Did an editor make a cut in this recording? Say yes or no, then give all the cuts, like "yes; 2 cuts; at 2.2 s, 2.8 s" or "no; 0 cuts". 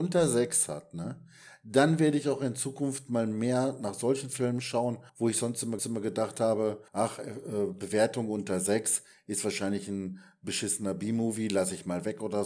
yes; 3 cuts; at 5.1 s, 5.8 s, 6.9 s